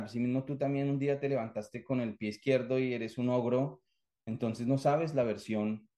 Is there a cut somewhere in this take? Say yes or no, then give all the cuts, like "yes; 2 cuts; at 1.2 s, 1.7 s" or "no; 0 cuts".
no; 0 cuts